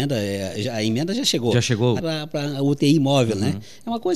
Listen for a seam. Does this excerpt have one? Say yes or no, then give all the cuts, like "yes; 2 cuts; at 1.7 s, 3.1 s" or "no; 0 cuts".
yes; 1 cut; at 2.0 s